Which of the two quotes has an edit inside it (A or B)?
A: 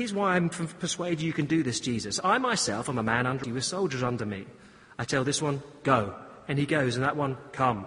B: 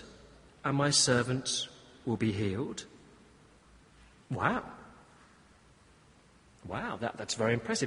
A